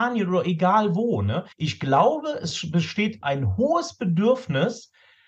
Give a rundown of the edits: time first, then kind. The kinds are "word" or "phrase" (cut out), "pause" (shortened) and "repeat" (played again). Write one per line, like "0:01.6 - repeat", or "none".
0:01.5 - pause
0:03.2 - word